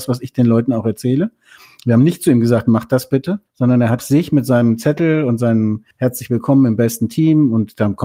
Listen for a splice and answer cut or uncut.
cut